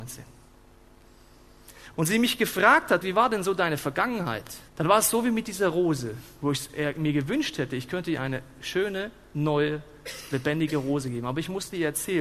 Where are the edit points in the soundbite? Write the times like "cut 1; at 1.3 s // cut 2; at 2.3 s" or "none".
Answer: cut 1; at 1.9 s // cut 2; at 3.0 s // cut 3; at 4.7 s

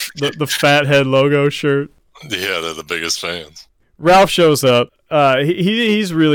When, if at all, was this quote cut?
none

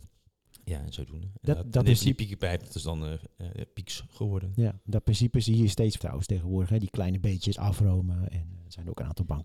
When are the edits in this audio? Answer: cut 1; at 6.0 s

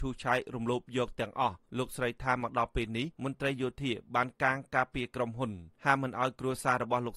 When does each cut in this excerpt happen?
cut 1; at 1.7 s // cut 2; at 3.1 s // cut 3; at 5.7 s

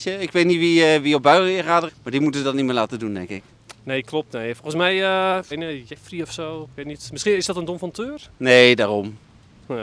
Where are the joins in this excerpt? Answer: cut 1; at 1.9 s // cut 2; at 5.5 s

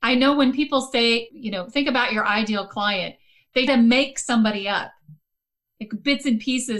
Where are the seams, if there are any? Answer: cut 1; at 3.7 s

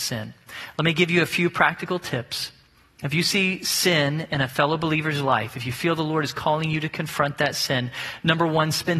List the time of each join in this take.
none

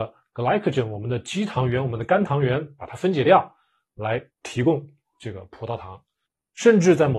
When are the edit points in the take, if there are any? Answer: cut 1; at 4.3 s

